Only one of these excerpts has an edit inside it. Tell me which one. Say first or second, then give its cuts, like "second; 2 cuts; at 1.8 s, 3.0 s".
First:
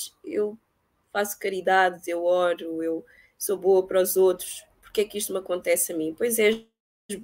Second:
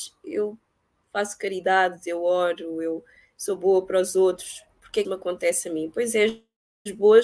second; 1 cut; at 5.0 s